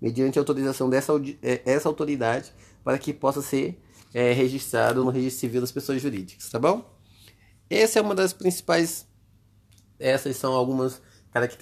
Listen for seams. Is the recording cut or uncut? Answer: cut